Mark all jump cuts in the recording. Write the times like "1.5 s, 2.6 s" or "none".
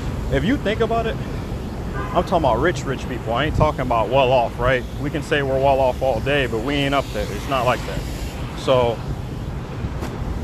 none